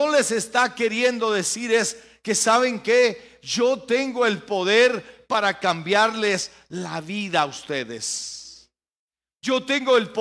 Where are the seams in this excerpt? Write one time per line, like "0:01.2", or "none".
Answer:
none

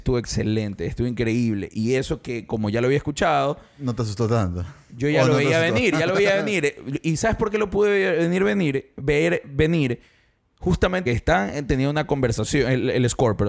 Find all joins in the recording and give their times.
0:11.1

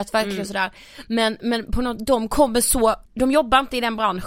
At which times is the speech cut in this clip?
0:03.1

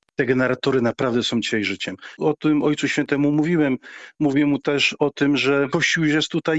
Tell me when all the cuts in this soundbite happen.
none

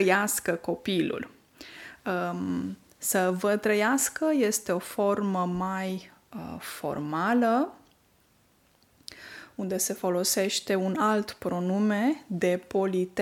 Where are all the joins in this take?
none

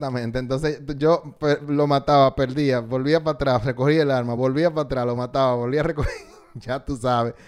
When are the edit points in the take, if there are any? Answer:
none

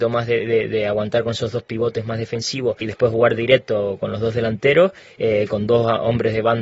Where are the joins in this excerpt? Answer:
0:02.8

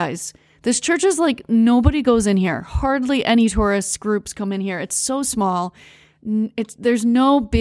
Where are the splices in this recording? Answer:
none

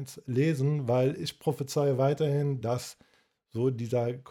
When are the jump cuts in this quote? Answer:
none

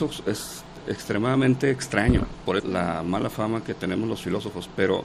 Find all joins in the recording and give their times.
0:02.6

